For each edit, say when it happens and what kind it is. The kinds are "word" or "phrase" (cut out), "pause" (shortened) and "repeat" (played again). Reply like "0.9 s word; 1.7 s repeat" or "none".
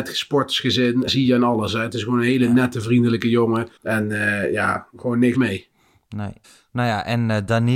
1.1 s word; 3.8 s pause; 5.3 s word; 6.4 s pause